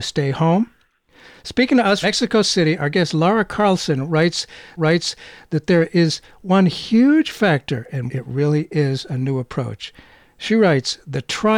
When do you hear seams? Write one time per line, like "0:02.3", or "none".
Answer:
0:02.0
0:04.8
0:08.1